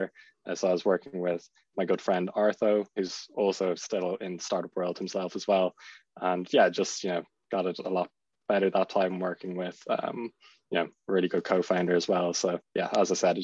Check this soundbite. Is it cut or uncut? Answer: cut